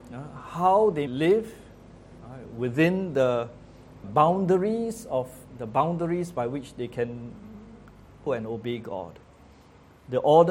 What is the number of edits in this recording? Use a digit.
4